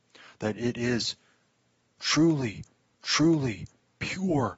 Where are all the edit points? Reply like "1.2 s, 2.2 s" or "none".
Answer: 2.9 s